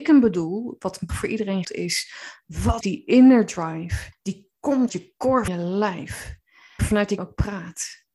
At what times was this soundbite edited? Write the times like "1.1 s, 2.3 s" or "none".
1.1 s, 1.6 s, 2.8 s, 4.1 s, 4.9 s, 5.5 s, 6.8 s, 7.2 s